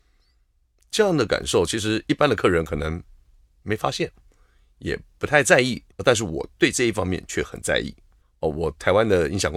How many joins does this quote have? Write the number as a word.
two